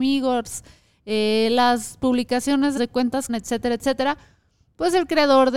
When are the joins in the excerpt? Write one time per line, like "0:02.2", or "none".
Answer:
0:02.8
0:03.3